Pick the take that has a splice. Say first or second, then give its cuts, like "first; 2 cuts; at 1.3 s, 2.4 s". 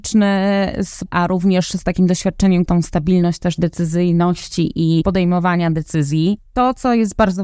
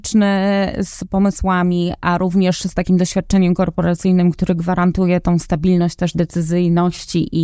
first; 2 cuts; at 1.1 s, 2.6 s